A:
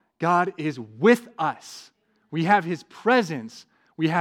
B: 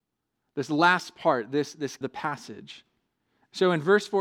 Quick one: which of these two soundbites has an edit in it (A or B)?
B